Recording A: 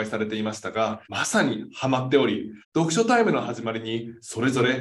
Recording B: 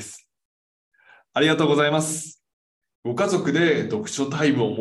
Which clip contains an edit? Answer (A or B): A